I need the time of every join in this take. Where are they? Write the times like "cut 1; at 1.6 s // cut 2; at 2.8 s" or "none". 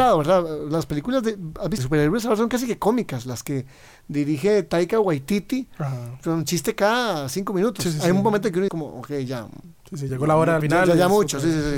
cut 1; at 1.8 s // cut 2; at 6.2 s // cut 3; at 8.7 s // cut 4; at 10.1 s // cut 5; at 10.6 s